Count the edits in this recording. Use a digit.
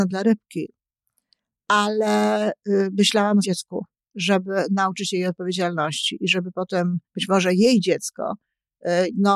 2